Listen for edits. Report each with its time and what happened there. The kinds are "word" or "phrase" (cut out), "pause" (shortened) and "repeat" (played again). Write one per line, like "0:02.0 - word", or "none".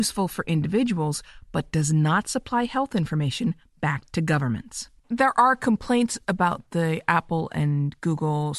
0:05.0 - pause